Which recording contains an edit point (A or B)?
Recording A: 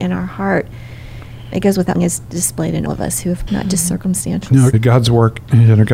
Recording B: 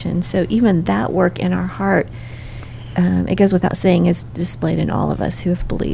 A